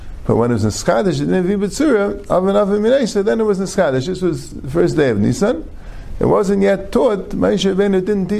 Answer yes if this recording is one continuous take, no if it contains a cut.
yes